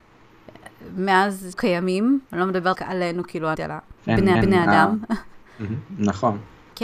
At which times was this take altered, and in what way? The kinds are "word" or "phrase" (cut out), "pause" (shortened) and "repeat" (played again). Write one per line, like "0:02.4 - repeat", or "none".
0:01.5 - word
0:02.3 - pause
0:02.7 - word
0:03.5 - phrase
0:04.0 - pause
0:04.3 - repeat